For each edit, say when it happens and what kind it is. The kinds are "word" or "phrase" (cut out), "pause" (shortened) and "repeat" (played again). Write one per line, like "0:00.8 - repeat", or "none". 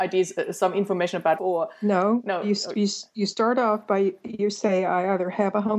0:01.4 - word